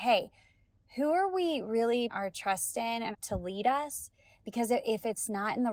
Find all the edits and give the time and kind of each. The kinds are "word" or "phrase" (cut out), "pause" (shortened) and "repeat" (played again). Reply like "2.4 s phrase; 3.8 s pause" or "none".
2.1 s word; 3.1 s phrase